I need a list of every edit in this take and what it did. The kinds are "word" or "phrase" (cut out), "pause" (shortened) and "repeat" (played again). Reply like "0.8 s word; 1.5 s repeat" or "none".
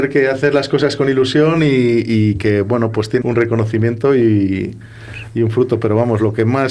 3.2 s word